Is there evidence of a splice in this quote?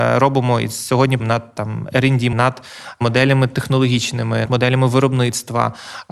yes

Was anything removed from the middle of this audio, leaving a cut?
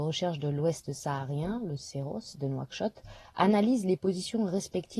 no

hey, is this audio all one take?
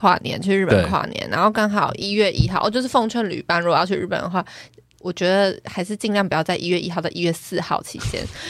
yes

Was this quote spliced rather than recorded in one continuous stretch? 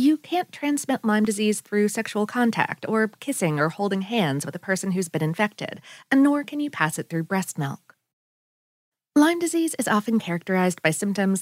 no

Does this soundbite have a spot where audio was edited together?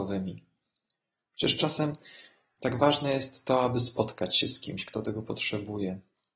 no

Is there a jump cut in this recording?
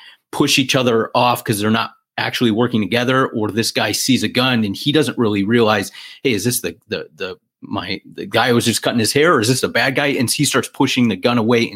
no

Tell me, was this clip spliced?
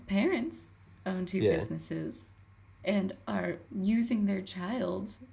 yes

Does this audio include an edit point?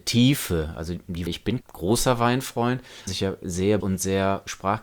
yes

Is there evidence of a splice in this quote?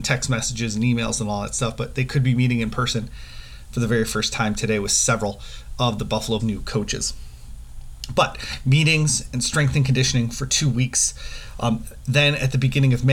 yes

